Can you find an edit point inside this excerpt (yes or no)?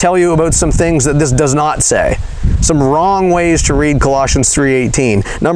no